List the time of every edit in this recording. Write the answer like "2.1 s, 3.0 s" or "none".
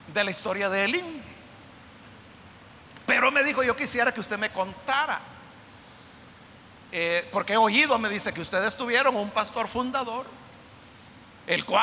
none